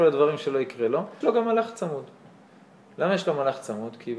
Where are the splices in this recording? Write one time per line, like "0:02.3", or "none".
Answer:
0:01.2